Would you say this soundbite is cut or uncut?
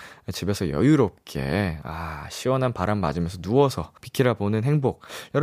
cut